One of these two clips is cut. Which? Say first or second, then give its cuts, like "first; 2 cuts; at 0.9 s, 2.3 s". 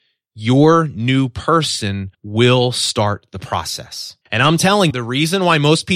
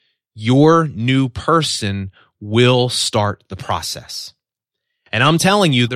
first; 3 cuts; at 2.1 s, 4.2 s, 4.9 s